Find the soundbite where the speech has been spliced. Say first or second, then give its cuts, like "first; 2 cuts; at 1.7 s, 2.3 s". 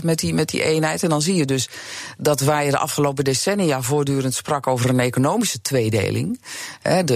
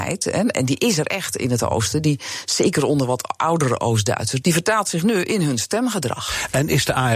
second; 1 cut; at 4.4 s